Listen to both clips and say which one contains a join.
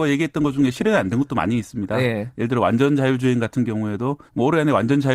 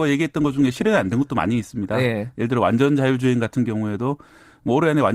first; 1 cut; at 4.3 s

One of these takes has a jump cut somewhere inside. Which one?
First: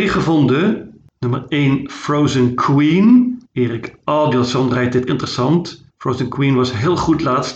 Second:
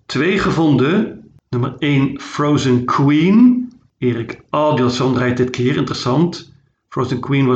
first; 3 cuts; at 3.4 s, 5.1 s, 5.9 s

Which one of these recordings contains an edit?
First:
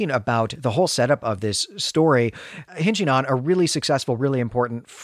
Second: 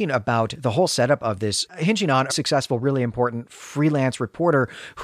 second; 2 cuts; at 1.7 s, 2.3 s

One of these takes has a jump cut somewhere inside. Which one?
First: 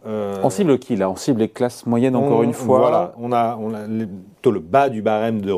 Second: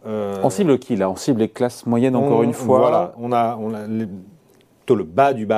first; 1 cut; at 4.3 s

